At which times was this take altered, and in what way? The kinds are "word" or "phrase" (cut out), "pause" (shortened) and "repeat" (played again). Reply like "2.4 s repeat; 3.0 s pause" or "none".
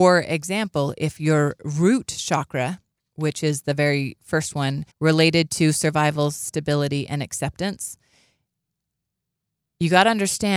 2.9 s pause; 4.9 s pause